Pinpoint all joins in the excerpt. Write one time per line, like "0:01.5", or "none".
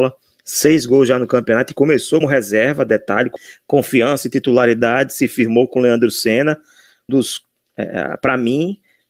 0:02.2
0:07.1